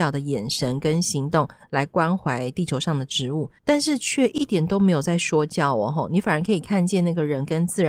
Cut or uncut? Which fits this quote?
cut